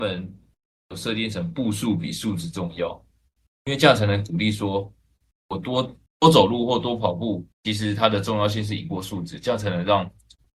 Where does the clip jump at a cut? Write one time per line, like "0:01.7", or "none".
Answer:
0:06.1
0:07.5